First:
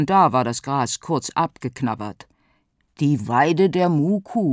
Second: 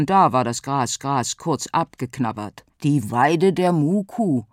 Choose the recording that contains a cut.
second; 2 cuts; at 1.0 s, 2.7 s

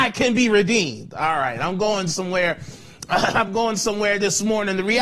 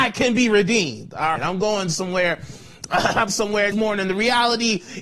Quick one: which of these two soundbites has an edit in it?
second; 3 cuts; at 1.4 s, 3.3 s, 3.7 s

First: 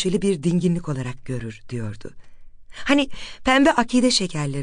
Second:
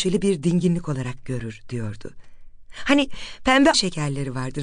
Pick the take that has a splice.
second; 1 cut; at 3.7 s

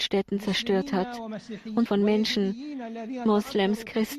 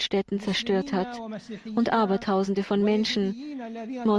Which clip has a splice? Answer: first; 1 cut; at 1.9 s

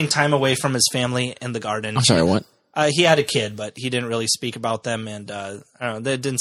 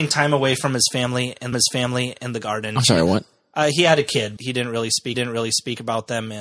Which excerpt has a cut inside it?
second; 3 cuts; at 1.5 s, 4.4 s, 5.1 s

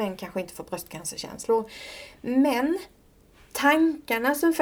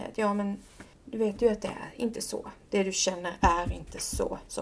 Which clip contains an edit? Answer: second; 1 cut; at 0.9 s

